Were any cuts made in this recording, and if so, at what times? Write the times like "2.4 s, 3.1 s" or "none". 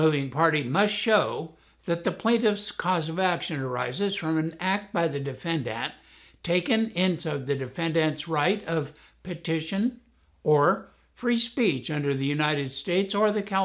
7.2 s